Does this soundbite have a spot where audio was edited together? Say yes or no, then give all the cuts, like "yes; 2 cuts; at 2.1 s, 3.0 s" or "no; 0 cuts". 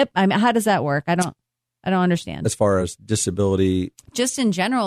no; 0 cuts